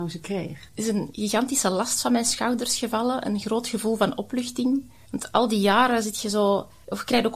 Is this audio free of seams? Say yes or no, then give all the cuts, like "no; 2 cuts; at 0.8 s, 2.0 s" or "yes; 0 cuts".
yes; 0 cuts